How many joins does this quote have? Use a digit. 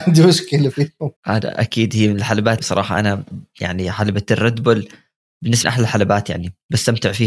3